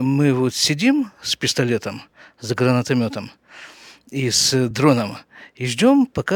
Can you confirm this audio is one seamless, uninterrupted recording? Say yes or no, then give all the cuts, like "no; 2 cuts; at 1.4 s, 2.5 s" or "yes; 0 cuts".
yes; 0 cuts